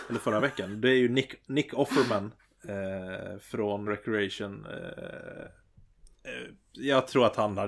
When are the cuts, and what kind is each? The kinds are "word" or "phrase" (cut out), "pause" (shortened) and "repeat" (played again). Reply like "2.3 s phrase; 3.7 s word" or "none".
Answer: 2.4 s pause; 3.9 s phrase